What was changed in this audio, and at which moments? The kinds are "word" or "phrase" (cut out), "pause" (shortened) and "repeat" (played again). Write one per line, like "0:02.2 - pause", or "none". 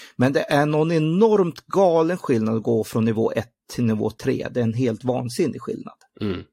none